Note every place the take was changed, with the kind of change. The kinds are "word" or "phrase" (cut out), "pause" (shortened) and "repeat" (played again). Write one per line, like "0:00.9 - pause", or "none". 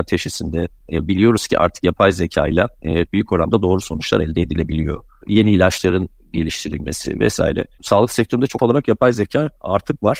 0:03.1 - word
0:08.6 - word